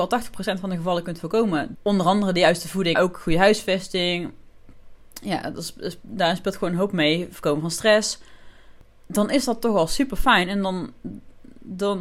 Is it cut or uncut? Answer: cut